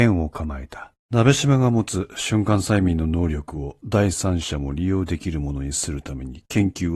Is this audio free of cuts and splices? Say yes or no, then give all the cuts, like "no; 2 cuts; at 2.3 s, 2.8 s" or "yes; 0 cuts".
no; 1 cut; at 1.0 s